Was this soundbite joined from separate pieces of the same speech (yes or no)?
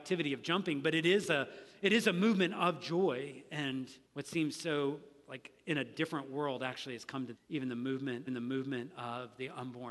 yes